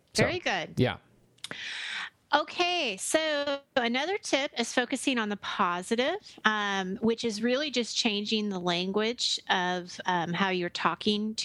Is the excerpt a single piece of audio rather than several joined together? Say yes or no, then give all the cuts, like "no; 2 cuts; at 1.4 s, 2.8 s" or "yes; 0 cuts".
yes; 0 cuts